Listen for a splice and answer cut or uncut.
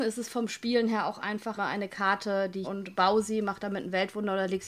cut